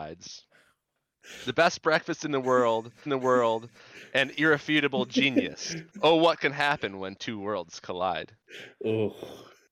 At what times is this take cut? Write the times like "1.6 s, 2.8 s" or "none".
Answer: 3.1 s, 5.9 s